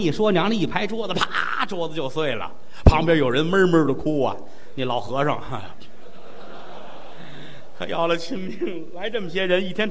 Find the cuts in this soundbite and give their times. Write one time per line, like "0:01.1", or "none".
none